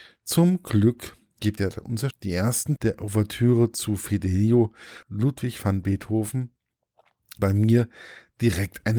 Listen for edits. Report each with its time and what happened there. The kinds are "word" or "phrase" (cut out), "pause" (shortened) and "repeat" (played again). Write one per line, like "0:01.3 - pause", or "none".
0:01.6 - word
0:02.1 - word
0:02.8 - word
0:05.0 - word
0:07.4 - word